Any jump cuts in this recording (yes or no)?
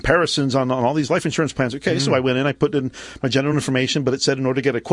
no